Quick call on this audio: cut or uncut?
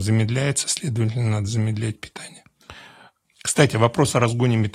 uncut